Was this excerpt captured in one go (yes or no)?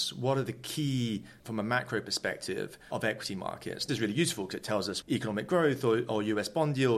no